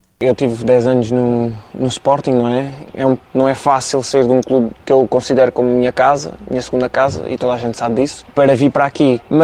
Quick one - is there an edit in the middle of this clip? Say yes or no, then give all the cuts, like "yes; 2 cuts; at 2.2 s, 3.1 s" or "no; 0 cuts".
no; 0 cuts